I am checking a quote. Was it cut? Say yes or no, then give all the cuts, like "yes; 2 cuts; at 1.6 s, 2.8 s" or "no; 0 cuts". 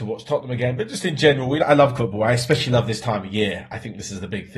yes; 2 cuts; at 1.6 s, 2.0 s